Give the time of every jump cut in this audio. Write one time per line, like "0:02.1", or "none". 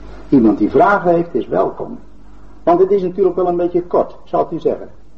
none